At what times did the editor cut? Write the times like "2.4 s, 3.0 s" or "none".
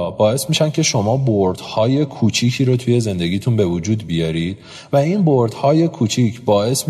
none